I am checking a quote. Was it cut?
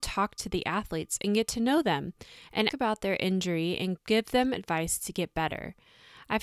yes; 2 cuts; at 2.7 s, 4.0 s

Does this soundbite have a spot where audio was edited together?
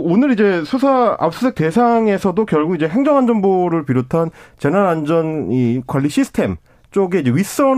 no; 0 cuts

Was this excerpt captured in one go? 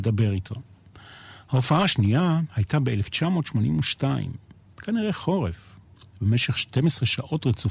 yes; 0 cuts

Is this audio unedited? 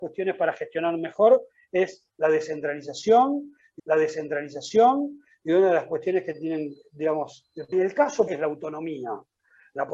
no; 3 cuts; at 3.8 s, 7.7 s, 8.3 s

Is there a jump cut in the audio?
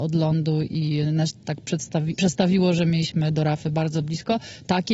no; 0 cuts

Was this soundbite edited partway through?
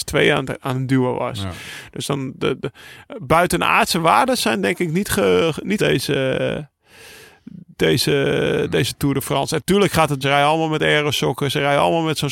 yes; 3 cuts; at 5.8 s, 7.7 s, 10.2 s

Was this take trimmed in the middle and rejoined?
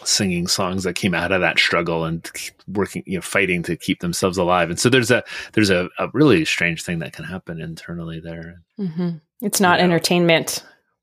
yes; 2 cuts; at 2.6 s, 8.7 s

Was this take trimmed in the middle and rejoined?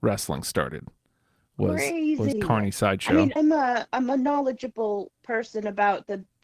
yes; 3 cuts; at 2.3 s, 3.4 s, 5.1 s

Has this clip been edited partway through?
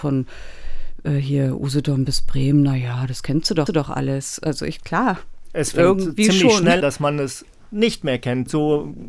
yes; 2 cuts; at 3.7 s, 6.8 s

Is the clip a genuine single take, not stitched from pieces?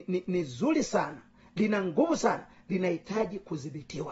yes; 0 cuts

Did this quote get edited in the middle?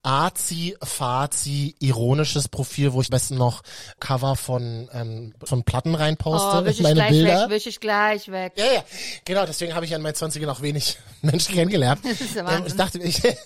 yes; 3 cuts; at 3.1 s, 4.0 s, 5.5 s

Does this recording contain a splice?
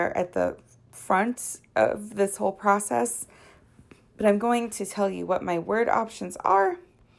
no; 0 cuts

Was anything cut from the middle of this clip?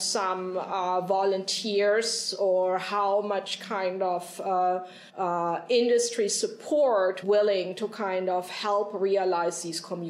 yes; 2 cuts; at 5.1 s, 7.2 s

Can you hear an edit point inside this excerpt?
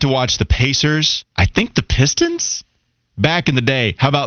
yes; 1 cut; at 1.3 s

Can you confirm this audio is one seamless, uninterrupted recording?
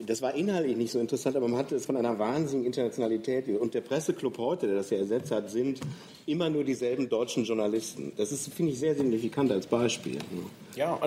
no; 1 cut; at 1.9 s

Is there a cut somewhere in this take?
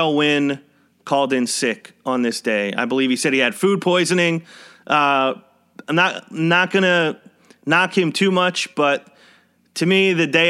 no; 0 cuts

